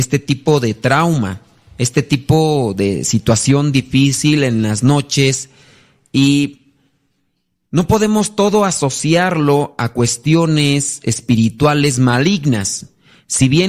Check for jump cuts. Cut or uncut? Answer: uncut